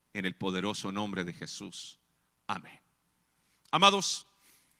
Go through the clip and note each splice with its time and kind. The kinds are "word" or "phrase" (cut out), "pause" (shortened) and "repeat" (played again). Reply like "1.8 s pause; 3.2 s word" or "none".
none